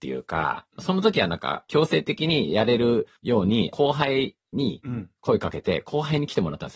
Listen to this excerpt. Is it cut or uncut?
cut